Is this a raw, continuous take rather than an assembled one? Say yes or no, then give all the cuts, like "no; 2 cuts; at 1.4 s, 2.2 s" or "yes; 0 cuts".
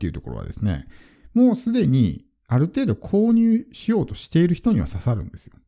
yes; 0 cuts